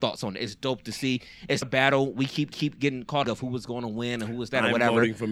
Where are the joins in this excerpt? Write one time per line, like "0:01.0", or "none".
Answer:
0:01.6
0:02.5
0:03.2